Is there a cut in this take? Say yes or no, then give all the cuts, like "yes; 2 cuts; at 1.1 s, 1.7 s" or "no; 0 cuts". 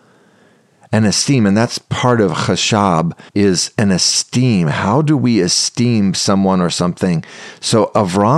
yes; 1 cut; at 3.3 s